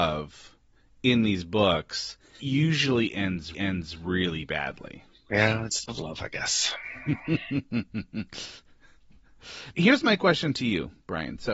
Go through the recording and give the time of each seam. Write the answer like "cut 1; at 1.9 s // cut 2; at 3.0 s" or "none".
cut 1; at 2.4 s // cut 2; at 3.5 s // cut 3; at 5.9 s // cut 4; at 9.7 s